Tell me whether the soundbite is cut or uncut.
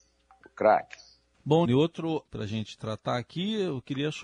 cut